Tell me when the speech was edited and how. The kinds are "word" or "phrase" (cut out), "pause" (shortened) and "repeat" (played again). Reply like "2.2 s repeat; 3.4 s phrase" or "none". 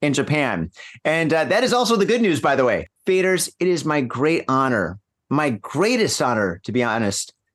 none

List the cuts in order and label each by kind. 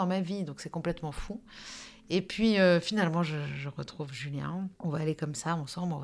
4.8 s pause

